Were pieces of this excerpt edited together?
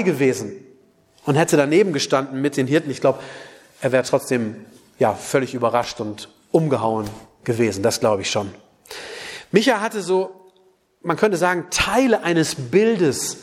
no; 0 cuts

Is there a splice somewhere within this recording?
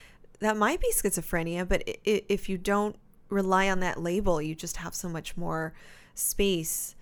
no; 0 cuts

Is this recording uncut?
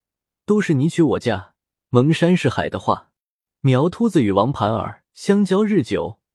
no; 1 cut; at 5.1 s

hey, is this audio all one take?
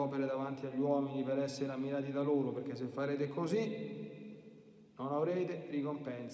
yes; 0 cuts

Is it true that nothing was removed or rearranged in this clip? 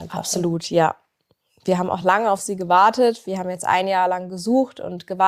yes; 0 cuts

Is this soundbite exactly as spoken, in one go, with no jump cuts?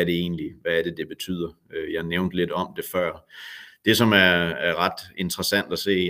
yes; 0 cuts

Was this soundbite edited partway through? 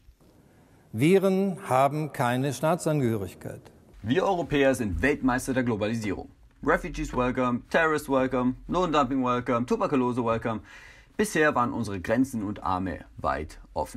no; 0 cuts

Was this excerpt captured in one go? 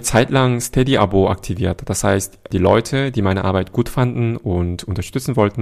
yes; 0 cuts

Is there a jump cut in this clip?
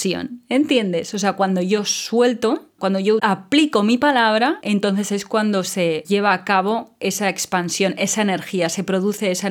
no; 0 cuts

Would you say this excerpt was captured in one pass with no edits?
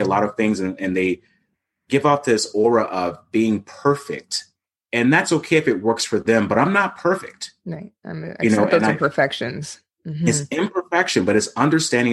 yes; 0 cuts

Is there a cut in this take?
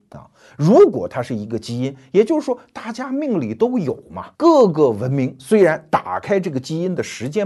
yes; 1 cut; at 4.3 s

